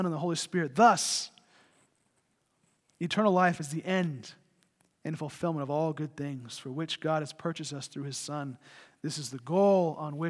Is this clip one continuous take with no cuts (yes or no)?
yes